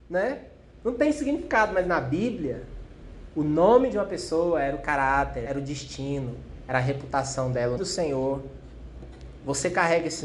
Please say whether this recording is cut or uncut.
cut